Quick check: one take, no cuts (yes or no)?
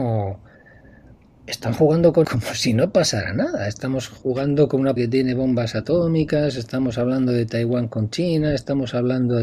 no